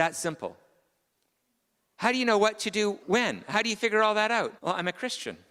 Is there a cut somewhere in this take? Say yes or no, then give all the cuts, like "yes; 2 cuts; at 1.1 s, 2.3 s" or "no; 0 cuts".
yes; 2 cuts; at 3.0 s, 4.6 s